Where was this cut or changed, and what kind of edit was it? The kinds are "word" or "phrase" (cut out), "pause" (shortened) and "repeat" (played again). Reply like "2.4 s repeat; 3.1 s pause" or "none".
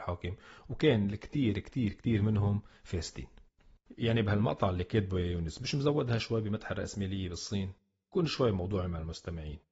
none